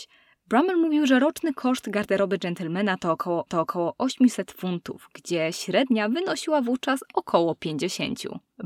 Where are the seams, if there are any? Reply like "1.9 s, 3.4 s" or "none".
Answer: 3.5 s